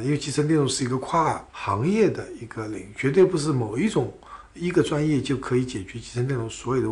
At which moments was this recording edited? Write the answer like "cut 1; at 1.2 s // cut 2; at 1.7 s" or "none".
cut 1; at 1.5 s